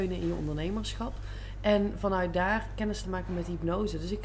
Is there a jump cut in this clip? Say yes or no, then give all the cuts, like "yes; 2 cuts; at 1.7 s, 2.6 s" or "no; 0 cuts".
yes; 1 cut; at 3.0 s